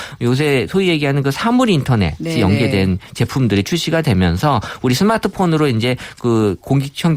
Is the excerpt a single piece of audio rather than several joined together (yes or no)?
yes